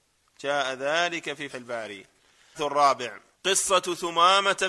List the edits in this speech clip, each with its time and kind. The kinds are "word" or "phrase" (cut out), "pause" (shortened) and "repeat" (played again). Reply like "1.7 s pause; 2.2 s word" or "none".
1.5 s word; 2.5 s word

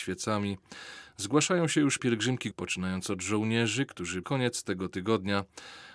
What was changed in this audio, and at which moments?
2.0 s word; 2.5 s word; 4.2 s phrase

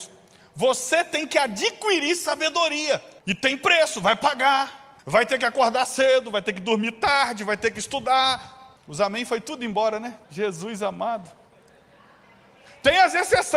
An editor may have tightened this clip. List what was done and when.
3.2 s pause; 5.0 s pause; 8.8 s pause; 10.2 s pause

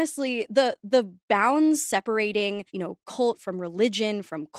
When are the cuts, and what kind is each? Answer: 1.2 s pause; 2.7 s pause

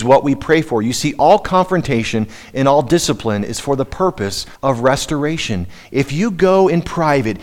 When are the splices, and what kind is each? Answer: 4.6 s pause

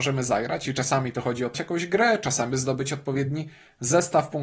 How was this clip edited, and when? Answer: 1.5 s phrase; 2.5 s word

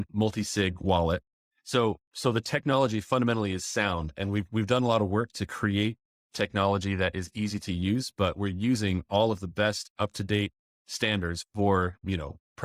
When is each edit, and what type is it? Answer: none

